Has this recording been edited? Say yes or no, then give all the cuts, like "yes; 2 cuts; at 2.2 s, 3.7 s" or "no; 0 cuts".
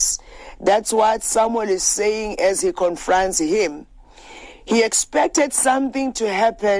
no; 0 cuts